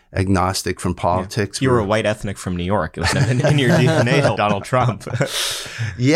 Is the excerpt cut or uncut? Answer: cut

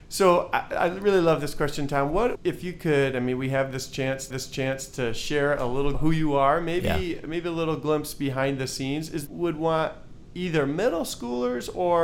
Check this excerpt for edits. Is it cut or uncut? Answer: cut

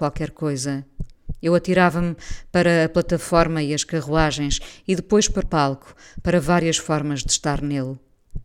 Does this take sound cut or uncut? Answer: cut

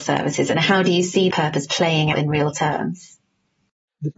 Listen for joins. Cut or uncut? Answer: cut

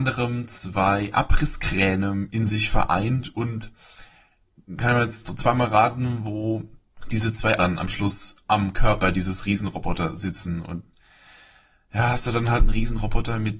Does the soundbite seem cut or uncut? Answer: cut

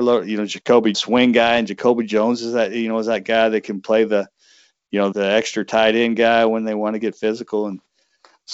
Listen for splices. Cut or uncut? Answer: cut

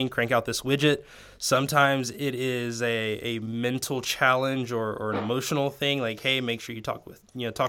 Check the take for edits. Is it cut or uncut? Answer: uncut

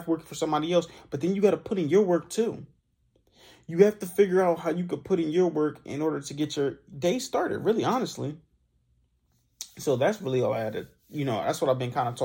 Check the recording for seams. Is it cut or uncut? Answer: uncut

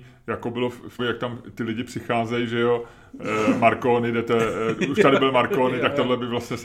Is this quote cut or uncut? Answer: cut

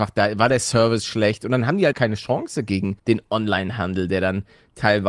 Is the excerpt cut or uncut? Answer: cut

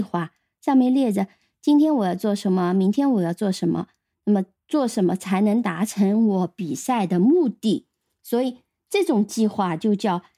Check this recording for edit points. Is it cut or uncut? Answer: uncut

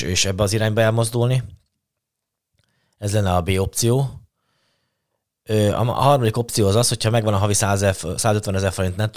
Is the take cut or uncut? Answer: uncut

